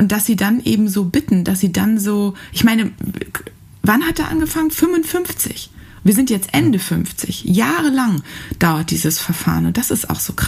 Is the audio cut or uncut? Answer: uncut